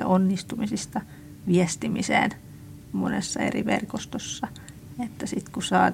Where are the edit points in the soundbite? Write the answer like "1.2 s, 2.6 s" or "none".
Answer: 2.8 s